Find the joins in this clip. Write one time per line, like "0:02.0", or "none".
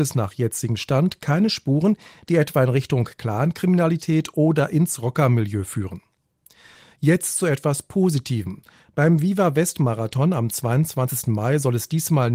none